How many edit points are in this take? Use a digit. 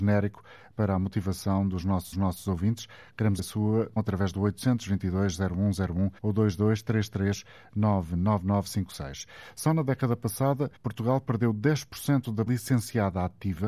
6